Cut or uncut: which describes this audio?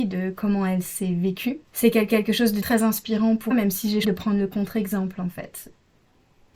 cut